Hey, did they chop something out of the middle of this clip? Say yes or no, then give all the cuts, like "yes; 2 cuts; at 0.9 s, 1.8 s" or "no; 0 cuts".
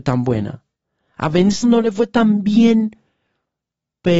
yes; 1 cut; at 1.6 s